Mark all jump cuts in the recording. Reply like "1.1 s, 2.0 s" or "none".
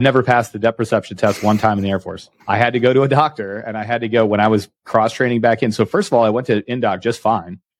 2.4 s